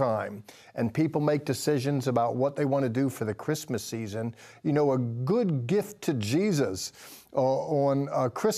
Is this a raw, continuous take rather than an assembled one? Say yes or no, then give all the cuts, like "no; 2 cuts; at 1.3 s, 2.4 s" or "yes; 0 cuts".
yes; 0 cuts